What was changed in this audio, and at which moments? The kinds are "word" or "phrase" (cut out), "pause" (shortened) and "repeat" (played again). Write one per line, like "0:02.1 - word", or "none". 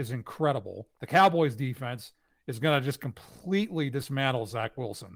0:01.0 - pause